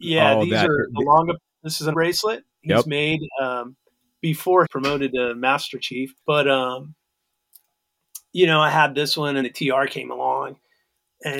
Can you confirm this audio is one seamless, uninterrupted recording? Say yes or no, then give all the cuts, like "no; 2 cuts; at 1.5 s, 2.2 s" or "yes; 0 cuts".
no; 5 cuts; at 1.9 s, 2.7 s, 4.6 s, 6.2 s, 9.4 s